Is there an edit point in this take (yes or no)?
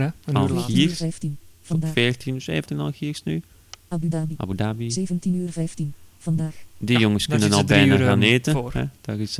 yes